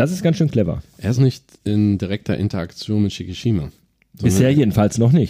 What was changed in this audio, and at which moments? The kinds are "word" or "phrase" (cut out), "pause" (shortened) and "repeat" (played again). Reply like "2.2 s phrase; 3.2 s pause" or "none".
1.2 s word